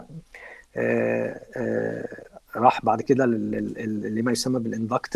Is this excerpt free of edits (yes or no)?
yes